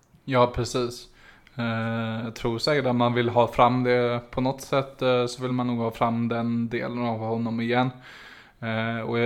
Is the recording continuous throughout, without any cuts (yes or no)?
yes